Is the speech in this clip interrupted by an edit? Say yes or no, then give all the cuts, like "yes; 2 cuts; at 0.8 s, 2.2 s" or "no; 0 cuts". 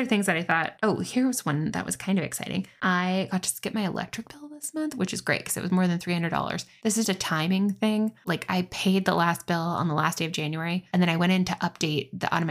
yes; 1 cut; at 7.0 s